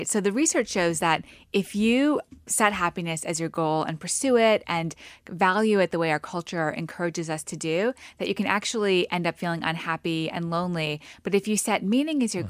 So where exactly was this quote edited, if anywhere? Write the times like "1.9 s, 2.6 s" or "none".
none